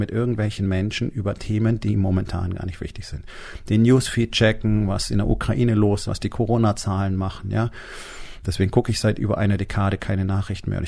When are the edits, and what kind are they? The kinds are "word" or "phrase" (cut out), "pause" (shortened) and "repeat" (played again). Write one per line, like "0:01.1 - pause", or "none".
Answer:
0:06.0 - word